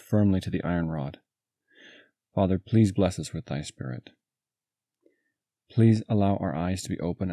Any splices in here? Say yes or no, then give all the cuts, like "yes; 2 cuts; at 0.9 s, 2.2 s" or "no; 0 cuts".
no; 0 cuts